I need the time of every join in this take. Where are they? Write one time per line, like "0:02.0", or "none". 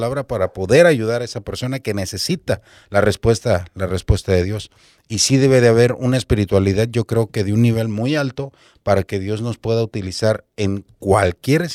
none